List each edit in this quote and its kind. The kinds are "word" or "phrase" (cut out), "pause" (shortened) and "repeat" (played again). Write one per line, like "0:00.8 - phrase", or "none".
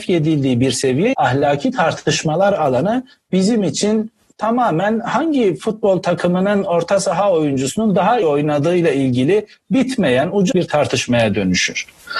0:01.1 - word
0:08.2 - word
0:10.5 - word